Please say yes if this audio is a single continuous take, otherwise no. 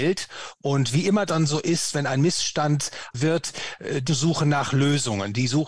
no